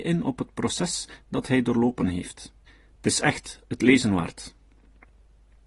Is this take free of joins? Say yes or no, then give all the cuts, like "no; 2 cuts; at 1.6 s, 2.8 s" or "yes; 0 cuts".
no; 1 cut; at 2.7 s